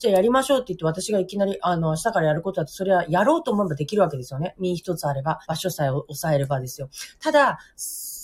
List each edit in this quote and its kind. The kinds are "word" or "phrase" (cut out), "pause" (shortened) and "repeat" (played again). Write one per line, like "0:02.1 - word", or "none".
0:05.4 - pause